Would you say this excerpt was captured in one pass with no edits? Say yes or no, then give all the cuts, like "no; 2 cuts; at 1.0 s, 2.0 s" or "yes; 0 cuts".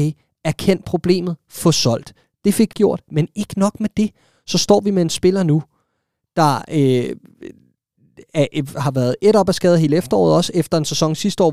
no; 1 cut; at 2.7 s